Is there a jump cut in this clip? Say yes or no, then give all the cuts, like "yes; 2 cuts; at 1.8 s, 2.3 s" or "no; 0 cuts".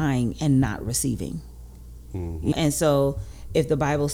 yes; 1 cut; at 2.5 s